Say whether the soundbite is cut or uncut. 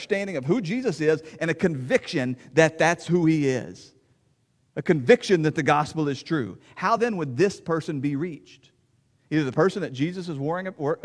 uncut